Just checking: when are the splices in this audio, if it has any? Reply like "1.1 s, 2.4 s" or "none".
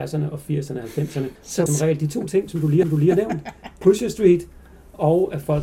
1.4 s, 1.7 s, 2.8 s